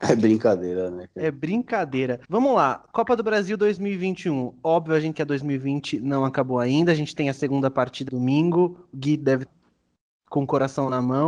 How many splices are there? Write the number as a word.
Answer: four